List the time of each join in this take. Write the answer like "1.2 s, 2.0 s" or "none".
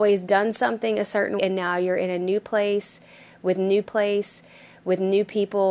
1.4 s, 3.8 s